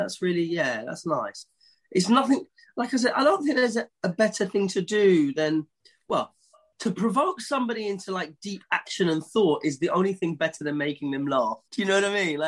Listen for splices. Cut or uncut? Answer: uncut